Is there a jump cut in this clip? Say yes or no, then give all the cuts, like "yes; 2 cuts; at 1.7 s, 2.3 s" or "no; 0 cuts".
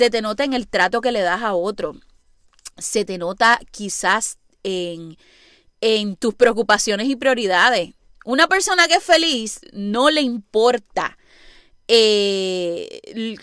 no; 0 cuts